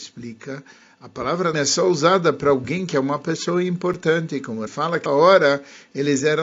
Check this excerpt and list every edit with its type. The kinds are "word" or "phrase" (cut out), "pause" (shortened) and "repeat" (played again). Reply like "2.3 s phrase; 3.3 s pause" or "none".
1.5 s word; 4.7 s word; 5.1 s word